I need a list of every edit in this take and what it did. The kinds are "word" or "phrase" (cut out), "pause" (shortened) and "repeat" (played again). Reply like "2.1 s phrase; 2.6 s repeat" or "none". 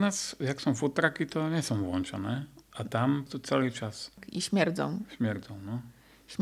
none